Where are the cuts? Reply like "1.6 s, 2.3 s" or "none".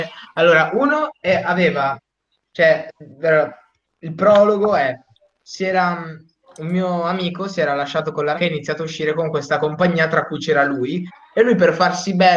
8.3 s